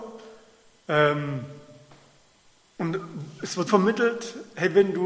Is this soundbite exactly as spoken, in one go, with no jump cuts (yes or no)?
no